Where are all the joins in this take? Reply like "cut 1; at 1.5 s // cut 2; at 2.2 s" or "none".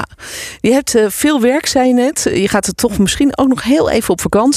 none